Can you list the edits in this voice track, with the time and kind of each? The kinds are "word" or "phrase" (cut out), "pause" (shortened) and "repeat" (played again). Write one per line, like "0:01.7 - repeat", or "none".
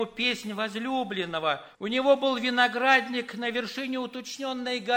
0:01.7 - pause